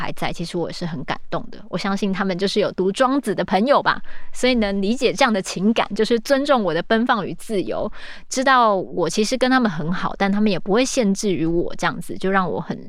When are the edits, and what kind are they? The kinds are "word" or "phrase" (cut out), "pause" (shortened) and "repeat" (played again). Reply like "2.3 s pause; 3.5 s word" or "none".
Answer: none

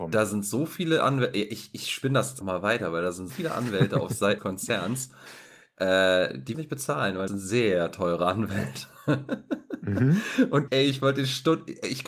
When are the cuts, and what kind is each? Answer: 2.4 s word; 3.3 s word; 4.4 s word; 6.5 s word; 7.3 s word; 10.7 s word

